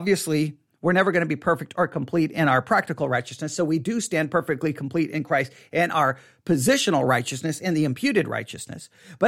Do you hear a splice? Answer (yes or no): no